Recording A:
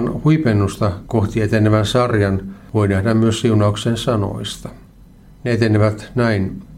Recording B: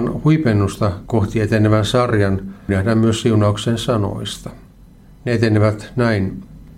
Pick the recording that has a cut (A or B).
B